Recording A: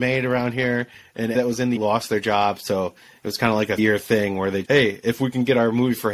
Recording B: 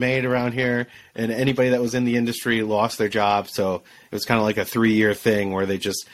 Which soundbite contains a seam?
A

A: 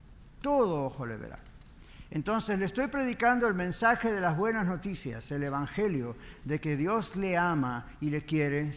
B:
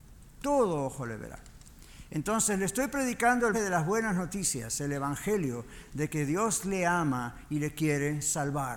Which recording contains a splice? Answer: B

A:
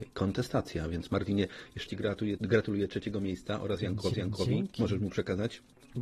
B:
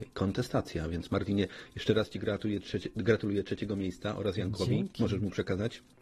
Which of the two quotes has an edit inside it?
A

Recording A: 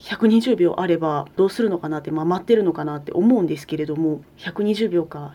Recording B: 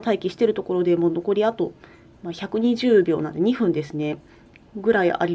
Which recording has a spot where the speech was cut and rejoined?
A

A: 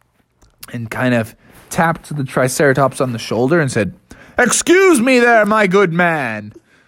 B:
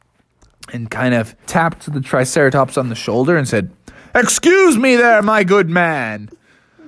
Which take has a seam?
B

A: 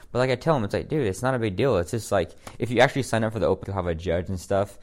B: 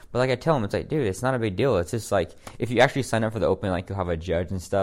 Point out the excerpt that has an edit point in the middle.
A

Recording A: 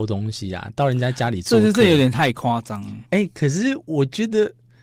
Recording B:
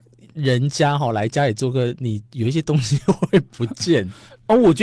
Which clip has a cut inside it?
A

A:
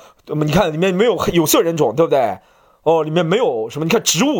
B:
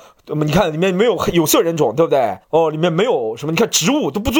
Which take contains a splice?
B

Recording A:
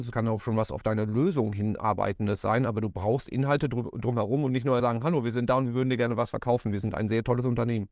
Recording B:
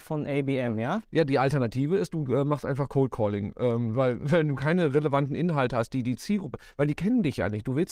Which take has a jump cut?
A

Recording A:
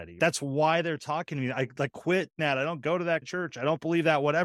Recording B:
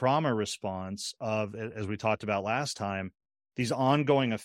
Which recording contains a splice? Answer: A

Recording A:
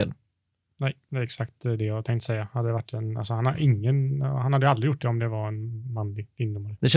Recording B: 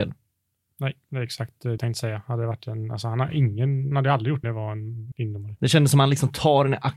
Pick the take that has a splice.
B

